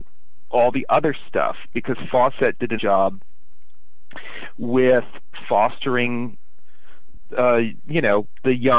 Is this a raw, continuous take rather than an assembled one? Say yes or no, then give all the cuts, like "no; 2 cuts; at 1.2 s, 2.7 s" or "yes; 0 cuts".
no; 1 cut; at 2.8 s